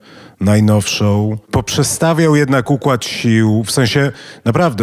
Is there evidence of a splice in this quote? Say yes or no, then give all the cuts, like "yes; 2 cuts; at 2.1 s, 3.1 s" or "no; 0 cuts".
yes; 1 cut; at 1.4 s